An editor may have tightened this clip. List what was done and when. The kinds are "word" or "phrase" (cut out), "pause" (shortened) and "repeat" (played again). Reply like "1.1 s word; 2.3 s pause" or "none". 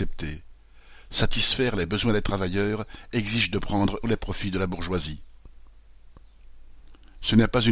4.0 s word